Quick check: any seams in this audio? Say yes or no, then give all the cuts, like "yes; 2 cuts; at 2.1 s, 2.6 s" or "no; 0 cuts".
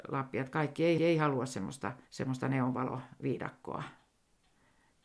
yes; 2 cuts; at 1.0 s, 2.0 s